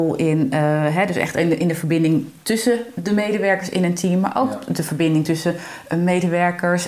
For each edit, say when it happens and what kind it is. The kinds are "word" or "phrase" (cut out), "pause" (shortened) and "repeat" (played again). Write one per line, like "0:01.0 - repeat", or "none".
none